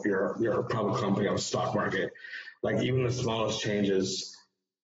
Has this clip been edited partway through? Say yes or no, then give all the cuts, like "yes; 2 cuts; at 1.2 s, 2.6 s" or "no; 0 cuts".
no; 0 cuts